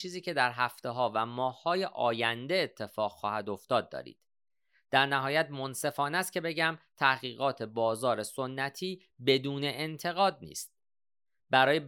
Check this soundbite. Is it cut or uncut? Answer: uncut